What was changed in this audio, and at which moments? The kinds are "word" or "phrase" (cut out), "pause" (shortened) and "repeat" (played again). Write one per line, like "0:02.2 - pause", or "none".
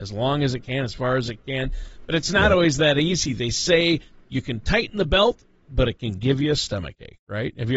none